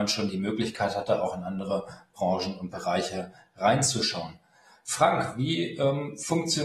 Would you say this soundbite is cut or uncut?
uncut